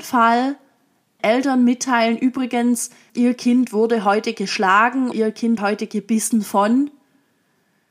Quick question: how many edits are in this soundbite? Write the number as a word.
four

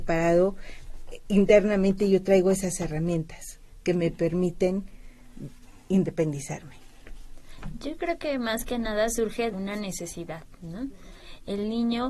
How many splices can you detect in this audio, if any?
one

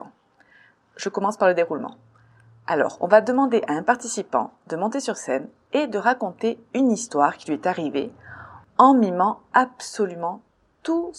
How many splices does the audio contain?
zero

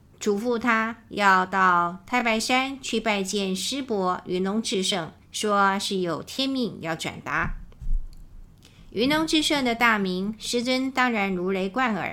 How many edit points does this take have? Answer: one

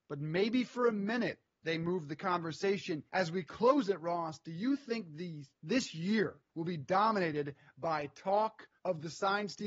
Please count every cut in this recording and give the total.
three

